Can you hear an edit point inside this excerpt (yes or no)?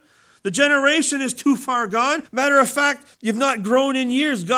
yes